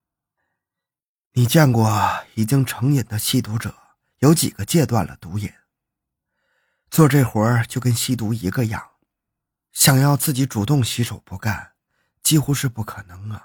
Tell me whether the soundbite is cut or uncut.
uncut